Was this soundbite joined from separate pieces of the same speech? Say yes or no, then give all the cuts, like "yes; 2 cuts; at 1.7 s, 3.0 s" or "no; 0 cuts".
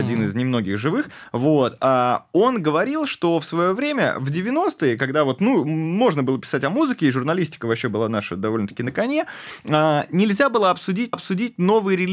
yes; 1 cut; at 11.1 s